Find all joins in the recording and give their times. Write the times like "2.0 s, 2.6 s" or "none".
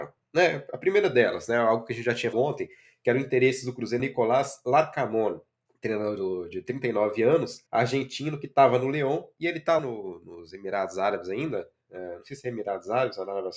2.3 s, 4.0 s, 5.7 s, 7.7 s, 9.8 s